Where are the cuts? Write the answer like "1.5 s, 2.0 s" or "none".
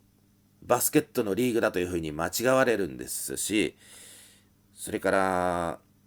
none